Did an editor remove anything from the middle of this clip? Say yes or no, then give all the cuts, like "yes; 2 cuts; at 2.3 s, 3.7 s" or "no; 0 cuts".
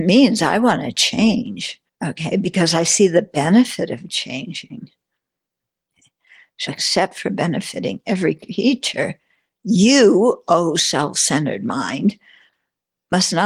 yes; 2 cuts; at 1.9 s, 6.7 s